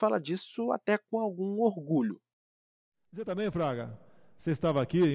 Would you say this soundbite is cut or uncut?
uncut